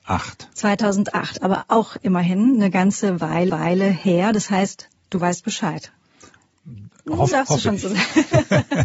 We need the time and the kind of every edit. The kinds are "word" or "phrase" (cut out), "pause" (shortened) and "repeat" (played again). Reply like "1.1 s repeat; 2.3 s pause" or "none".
3.5 s repeat; 7.3 s word